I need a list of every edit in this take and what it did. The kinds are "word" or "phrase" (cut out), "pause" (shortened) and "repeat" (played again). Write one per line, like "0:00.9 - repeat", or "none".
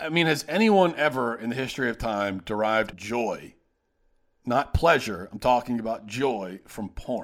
0:02.9 - word